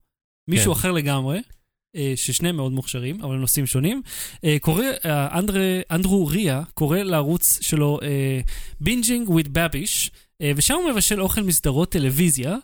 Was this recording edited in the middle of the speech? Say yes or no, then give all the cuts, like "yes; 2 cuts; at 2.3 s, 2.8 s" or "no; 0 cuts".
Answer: no; 0 cuts